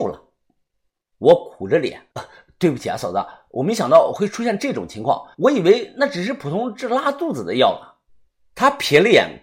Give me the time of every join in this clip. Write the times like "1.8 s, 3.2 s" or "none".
2.1 s, 5.3 s